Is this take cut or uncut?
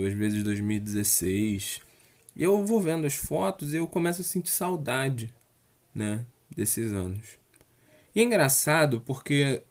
uncut